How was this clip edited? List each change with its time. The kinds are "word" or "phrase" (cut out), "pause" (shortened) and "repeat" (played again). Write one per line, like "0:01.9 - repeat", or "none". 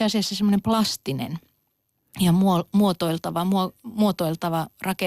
none